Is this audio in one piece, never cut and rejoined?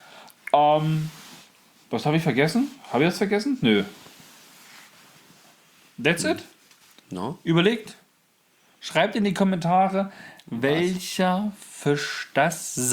yes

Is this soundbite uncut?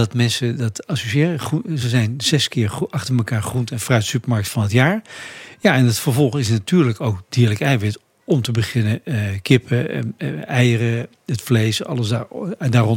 yes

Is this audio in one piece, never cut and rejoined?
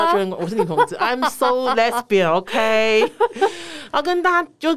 yes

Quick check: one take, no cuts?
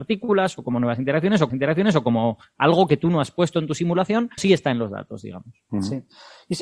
no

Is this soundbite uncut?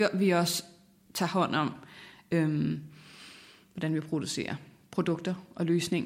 yes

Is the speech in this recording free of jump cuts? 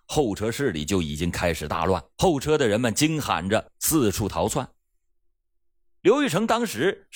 no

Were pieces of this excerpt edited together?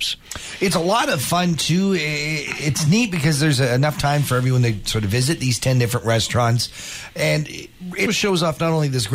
yes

